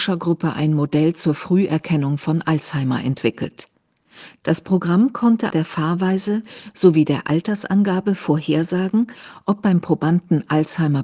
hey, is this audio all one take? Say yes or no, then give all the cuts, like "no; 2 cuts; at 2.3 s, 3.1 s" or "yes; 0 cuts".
no; 1 cut; at 5.5 s